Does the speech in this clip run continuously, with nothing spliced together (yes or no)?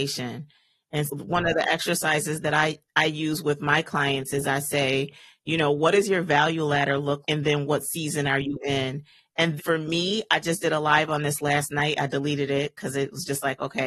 no